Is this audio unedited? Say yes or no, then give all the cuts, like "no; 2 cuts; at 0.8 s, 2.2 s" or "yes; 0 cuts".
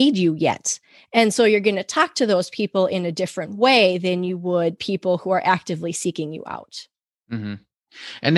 yes; 0 cuts